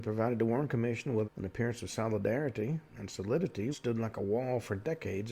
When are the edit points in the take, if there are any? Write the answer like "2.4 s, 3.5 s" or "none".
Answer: 1.2 s, 2.9 s, 3.7 s